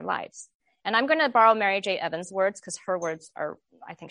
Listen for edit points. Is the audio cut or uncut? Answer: uncut